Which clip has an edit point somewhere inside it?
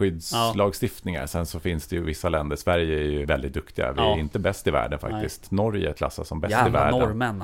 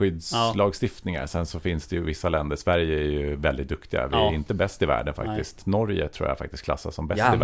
first; 2 cuts; at 3.2 s, 5.9 s

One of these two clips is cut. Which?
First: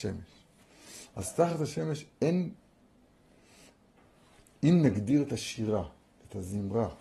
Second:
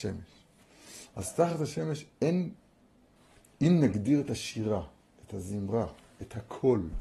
second; 1 cut; at 3.2 s

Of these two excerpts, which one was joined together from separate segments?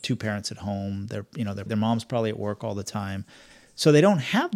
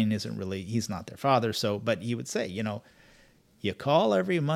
first; 1 cut; at 1.7 s

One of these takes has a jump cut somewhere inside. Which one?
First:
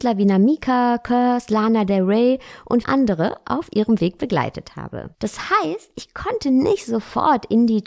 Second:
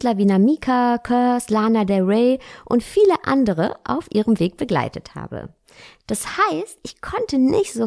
first; 2 cuts; at 2.8 s, 5.1 s

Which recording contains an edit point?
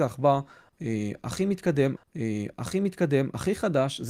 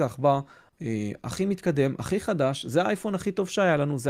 first; 1 cut; at 2.0 s

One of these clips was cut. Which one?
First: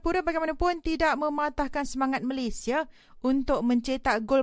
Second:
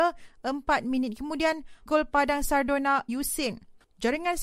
second; 2 cuts; at 1.9 s, 3.1 s

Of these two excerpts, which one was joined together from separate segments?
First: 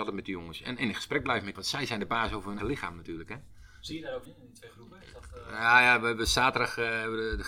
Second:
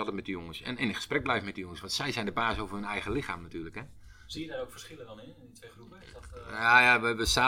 first; 3 cuts; at 1.5 s, 2.6 s, 4.2 s

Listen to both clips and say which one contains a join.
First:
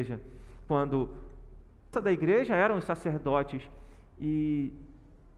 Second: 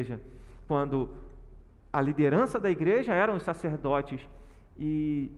first; 1 cut; at 1.9 s

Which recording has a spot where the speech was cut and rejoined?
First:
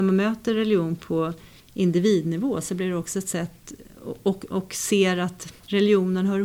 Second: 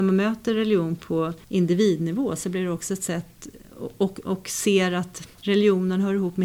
second; 1 cut; at 1.4 s

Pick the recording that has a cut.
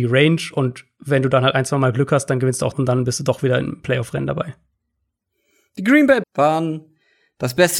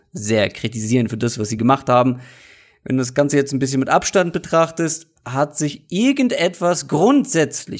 first; 2 cuts; at 2.7 s, 6.2 s

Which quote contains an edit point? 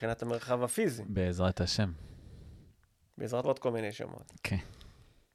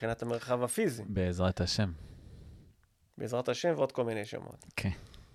first; 1 cut; at 3.4 s

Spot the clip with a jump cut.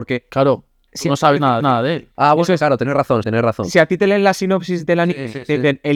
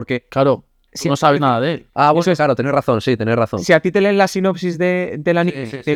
first; 3 cuts; at 1.6 s, 3.2 s, 4.8 s

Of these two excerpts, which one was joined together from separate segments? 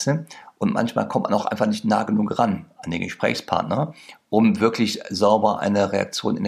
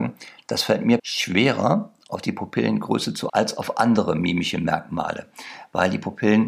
second; 2 cuts; at 1.0 s, 3.3 s

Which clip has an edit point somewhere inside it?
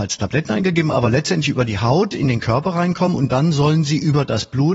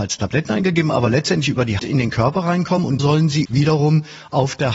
second; 3 cuts; at 1.8 s, 3.0 s, 3.5 s

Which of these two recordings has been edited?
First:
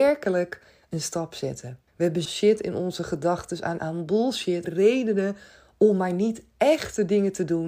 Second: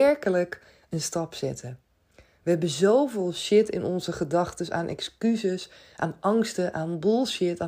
first; 4 cuts; at 1.9 s, 2.3 s, 3.8 s, 4.6 s

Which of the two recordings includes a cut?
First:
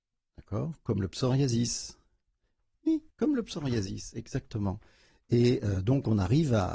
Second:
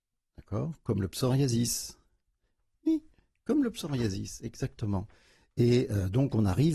first; 1 cut; at 3.1 s

